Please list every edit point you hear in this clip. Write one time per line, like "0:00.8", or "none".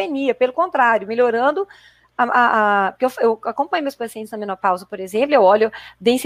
none